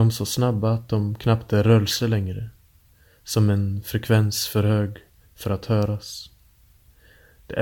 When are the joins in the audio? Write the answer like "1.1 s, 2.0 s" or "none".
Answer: none

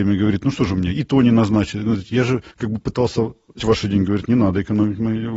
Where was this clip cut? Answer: 2.5 s, 3.6 s

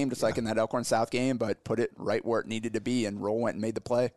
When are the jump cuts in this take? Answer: none

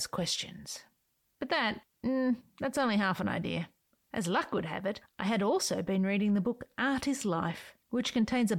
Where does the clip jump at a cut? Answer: none

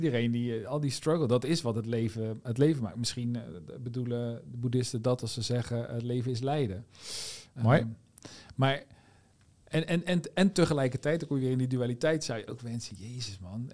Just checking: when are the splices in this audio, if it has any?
none

